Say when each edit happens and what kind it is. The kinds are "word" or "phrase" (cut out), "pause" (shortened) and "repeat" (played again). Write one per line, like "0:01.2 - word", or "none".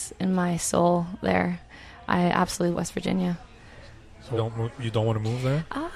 0:02.7 - word
0:04.4 - word
0:04.8 - word